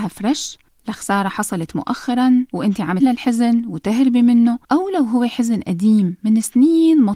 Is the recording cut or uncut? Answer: cut